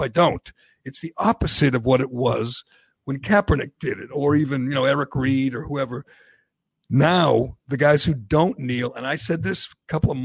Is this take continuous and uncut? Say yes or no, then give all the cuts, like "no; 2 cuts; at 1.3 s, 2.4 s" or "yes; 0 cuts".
yes; 0 cuts